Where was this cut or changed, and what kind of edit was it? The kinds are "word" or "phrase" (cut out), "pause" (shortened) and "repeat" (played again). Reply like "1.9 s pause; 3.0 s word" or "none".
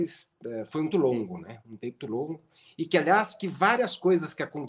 0.9 s phrase; 2.0 s word